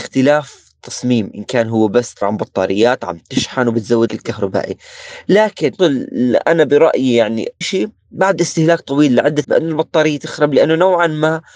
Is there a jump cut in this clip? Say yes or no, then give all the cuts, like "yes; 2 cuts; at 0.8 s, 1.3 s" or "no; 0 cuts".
yes; 5 cuts; at 2.2 s, 4.1 s, 5.8 s, 7.6 s, 9.4 s